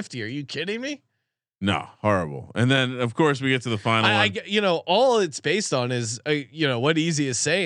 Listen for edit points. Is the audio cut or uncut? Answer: uncut